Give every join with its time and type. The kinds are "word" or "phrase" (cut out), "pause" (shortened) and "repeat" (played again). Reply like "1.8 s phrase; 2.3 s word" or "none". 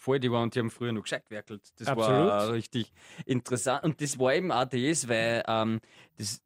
none